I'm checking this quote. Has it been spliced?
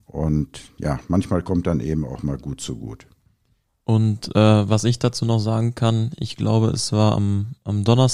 no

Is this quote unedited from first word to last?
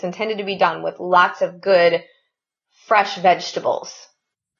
yes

